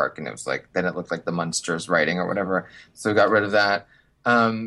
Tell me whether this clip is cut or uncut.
uncut